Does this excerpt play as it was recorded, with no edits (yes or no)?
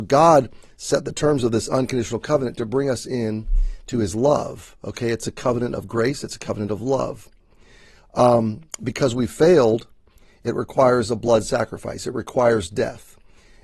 yes